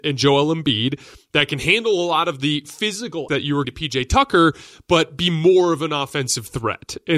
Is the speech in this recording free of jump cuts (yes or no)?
no